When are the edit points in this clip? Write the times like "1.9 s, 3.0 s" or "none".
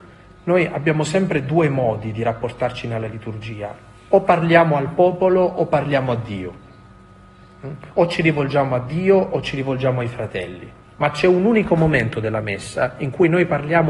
10.8 s